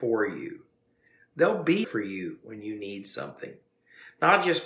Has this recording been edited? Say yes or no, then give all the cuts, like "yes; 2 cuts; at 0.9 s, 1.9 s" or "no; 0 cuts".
yes; 1 cut; at 1.8 s